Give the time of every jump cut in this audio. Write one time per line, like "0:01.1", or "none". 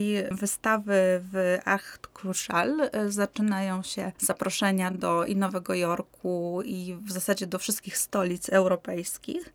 none